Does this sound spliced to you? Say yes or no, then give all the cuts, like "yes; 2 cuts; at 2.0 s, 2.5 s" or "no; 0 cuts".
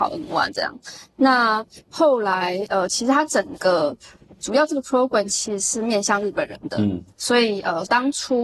no; 0 cuts